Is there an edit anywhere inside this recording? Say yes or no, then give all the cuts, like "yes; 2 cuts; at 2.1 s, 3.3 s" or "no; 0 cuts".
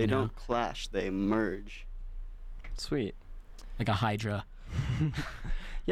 no; 0 cuts